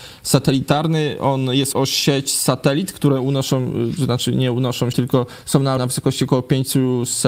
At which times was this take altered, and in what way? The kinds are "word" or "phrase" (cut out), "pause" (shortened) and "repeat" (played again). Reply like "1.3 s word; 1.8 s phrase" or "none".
1.7 s word; 4.9 s word; 5.8 s word